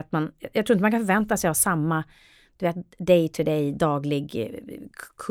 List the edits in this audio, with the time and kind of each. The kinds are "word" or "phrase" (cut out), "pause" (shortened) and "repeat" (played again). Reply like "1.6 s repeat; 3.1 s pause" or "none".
none